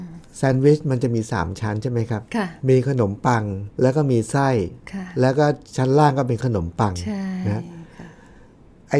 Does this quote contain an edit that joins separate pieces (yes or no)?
yes